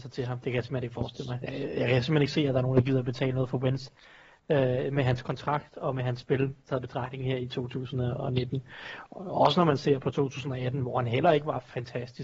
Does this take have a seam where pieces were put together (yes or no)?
no